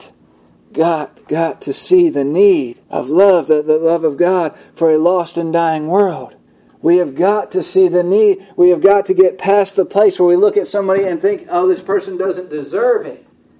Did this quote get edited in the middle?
yes; 2 cuts; at 2.8 s, 6.5 s

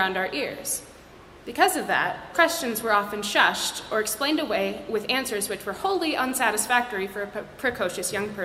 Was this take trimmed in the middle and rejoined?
yes; 1 cut; at 2.3 s

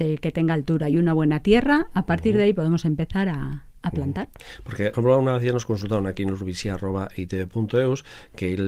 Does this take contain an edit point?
yes; 1 cut; at 4.9 s

